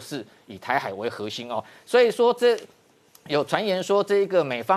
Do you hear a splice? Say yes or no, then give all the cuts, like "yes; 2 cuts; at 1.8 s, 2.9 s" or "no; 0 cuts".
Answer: no; 0 cuts